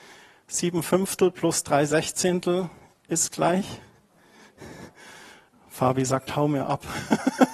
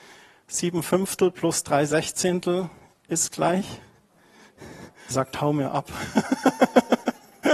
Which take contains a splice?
second; 1 cut; at 5.1 s

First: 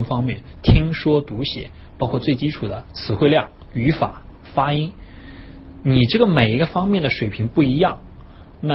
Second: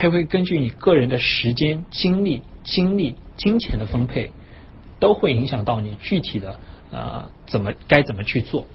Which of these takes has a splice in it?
second; 1 cut; at 2.6 s

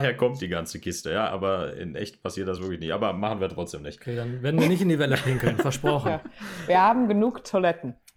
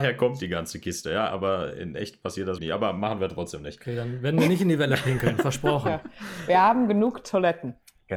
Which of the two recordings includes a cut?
second; 1 cut; at 2.6 s

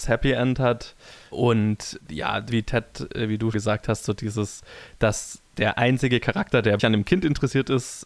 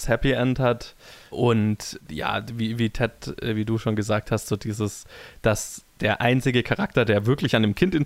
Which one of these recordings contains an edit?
first; 3 cuts; at 2.5 s, 3.5 s, 6.8 s

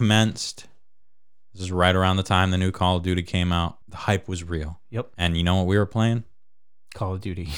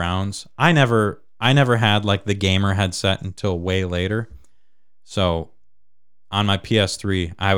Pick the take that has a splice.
first; 2 cuts; at 3.8 s, 5.1 s

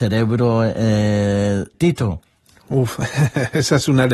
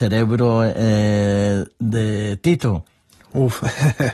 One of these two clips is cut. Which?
first; 1 cut; at 1.7 s

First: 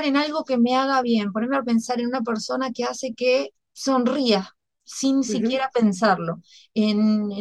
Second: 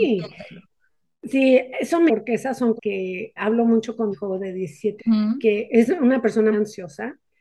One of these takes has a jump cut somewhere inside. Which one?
second; 6 cuts; at 2.1 s, 2.8 s, 3.4 s, 4.1 s, 5.0 s, 6.5 s

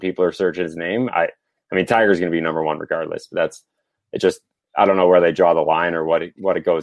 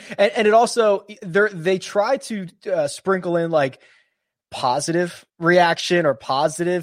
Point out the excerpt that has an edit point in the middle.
second; 2 cuts; at 1.2 s, 5.3 s

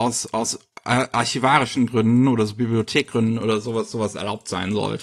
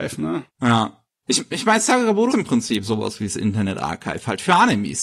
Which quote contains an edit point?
second; 1 cut; at 2.3 s

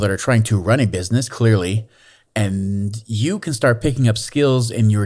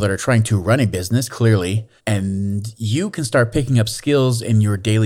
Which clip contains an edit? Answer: second; 1 cut; at 2.0 s

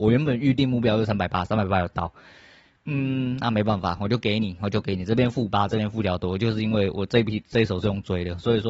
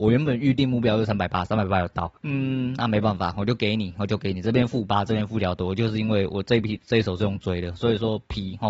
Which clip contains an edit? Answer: second; 1 cut; at 2.2 s

